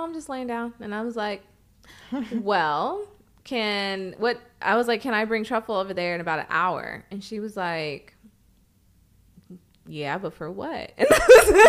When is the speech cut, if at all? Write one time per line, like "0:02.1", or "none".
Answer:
none